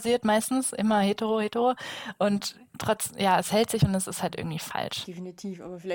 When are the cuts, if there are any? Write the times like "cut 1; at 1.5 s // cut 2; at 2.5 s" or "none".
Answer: none